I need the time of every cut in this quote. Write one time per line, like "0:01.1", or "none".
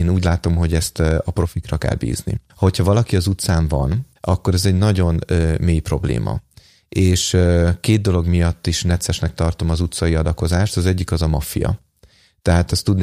0:02.5
0:04.2

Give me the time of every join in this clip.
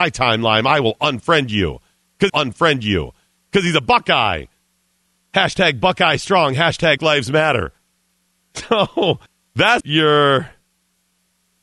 0:02.3
0:07.0
0:09.3
0:09.8

